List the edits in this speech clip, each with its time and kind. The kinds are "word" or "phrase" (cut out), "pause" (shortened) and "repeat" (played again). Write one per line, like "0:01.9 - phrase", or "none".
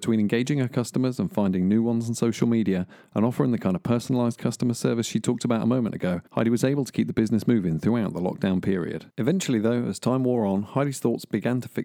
0:06.3 - pause
0:09.1 - pause